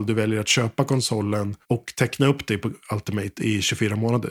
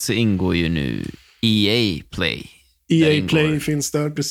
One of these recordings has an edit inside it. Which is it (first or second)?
first